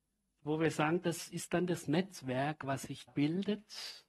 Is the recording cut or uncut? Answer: cut